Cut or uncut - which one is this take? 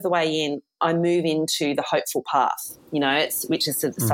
cut